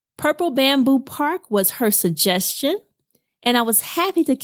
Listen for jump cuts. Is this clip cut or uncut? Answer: uncut